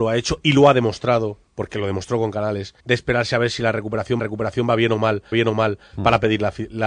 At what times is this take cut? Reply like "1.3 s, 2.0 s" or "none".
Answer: 1.5 s, 2.8 s, 4.2 s, 5.3 s